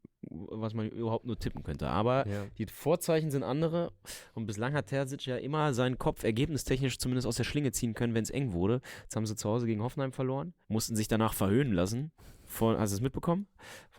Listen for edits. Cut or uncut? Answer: cut